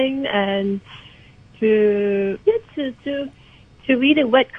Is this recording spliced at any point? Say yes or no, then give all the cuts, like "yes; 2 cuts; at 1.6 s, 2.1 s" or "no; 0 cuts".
yes; 1 cut; at 2.4 s